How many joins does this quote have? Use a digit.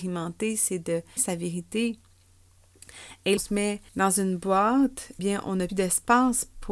5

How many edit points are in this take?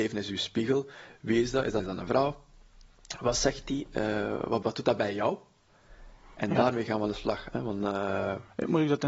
2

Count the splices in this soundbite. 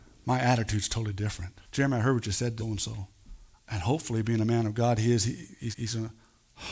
4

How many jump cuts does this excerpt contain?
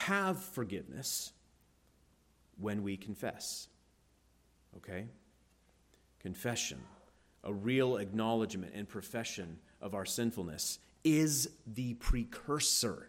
0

